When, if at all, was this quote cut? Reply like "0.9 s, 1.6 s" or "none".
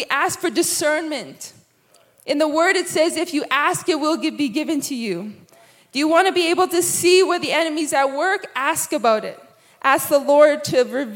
none